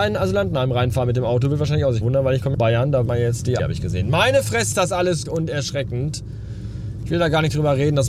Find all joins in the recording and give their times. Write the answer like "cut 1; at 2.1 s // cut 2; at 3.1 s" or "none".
cut 1; at 2.0 s // cut 2; at 2.5 s // cut 3; at 3.1 s // cut 4; at 3.6 s // cut 5; at 4.7 s // cut 6; at 5.3 s